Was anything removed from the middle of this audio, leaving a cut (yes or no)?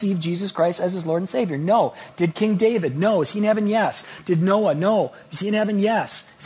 no